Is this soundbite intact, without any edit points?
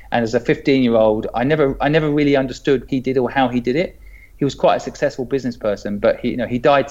no; 1 cut; at 2.9 s

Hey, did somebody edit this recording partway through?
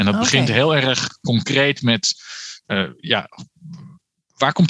yes; 1 cut; at 2.6 s

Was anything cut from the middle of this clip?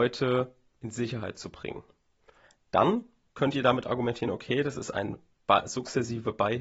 no; 0 cuts

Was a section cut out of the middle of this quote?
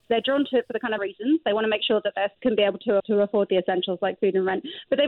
yes; 3 cuts; at 1.0 s, 2.3 s, 3.0 s

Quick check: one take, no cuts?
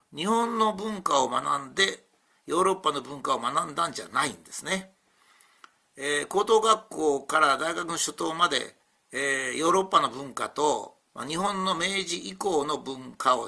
no; 2 cuts; at 8.8 s, 11.0 s

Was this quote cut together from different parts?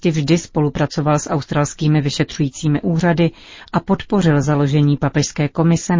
no; 0 cuts

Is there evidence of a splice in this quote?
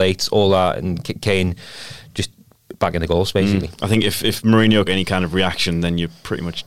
yes; 1 cut; at 4.9 s

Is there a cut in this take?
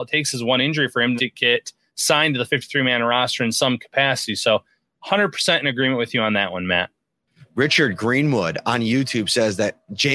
yes; 1 cut; at 1.2 s

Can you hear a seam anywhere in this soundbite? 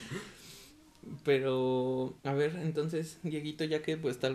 yes; 1 cut; at 2.2 s

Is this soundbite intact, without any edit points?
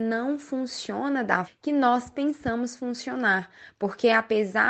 no; 1 cut; at 1.4 s

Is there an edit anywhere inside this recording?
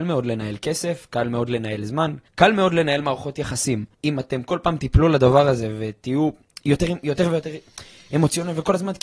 yes; 2 cuts; at 2.3 s, 3.9 s

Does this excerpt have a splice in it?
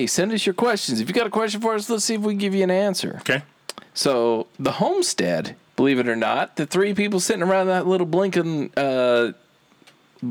yes; 1 cut; at 3.9 s

